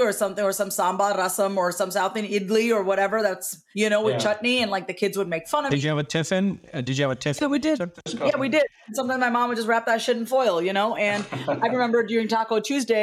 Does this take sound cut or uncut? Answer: uncut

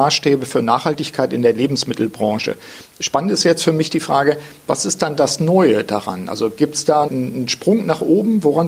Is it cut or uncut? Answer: cut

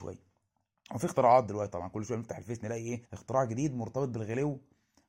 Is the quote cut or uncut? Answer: cut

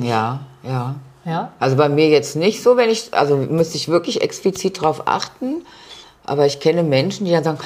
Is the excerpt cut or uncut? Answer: uncut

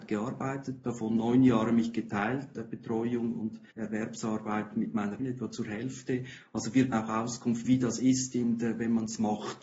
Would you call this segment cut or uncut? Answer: cut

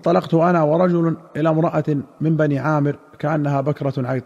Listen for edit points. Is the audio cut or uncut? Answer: uncut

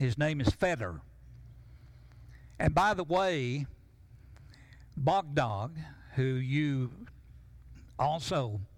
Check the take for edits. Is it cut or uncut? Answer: uncut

